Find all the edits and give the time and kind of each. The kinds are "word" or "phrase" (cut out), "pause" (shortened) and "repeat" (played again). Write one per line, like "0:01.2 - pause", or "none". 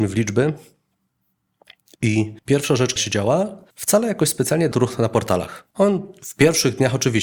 0:02.4 - pause
0:03.0 - word
0:03.7 - pause
0:04.7 - phrase
0:05.7 - pause